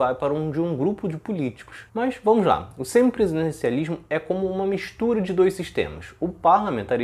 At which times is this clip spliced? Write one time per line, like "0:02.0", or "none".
0:01.9